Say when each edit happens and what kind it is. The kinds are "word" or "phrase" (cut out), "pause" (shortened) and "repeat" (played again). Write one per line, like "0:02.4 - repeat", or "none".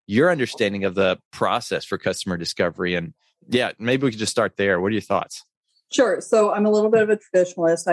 none